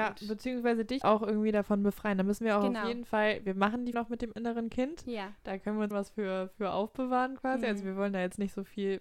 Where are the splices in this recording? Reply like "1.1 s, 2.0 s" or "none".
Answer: 1.0 s, 3.9 s, 5.9 s